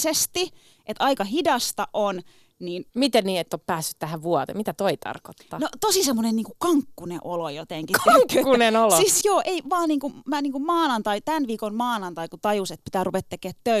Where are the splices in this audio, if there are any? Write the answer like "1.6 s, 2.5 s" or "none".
2.9 s, 9.2 s